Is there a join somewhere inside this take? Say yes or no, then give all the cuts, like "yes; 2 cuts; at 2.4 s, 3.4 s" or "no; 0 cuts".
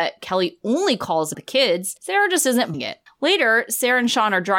yes; 4 cuts; at 1.3 s, 2.0 s, 2.7 s, 3.1 s